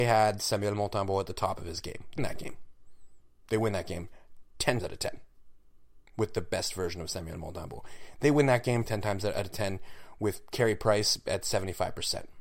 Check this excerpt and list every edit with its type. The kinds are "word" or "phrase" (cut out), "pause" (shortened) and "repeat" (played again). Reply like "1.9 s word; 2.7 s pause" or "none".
2.2 s word; 4.8 s word; 8.9 s word